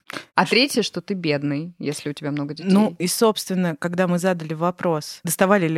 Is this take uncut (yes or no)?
yes